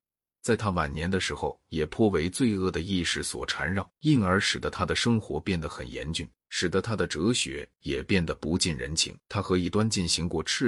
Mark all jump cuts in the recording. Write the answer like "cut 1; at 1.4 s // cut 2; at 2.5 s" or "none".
cut 1; at 4.0 s // cut 2; at 6.4 s // cut 3; at 9.2 s